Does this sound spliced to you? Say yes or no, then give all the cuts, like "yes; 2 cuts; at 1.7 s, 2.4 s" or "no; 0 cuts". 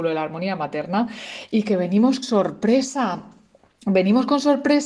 yes; 1 cut; at 2.2 s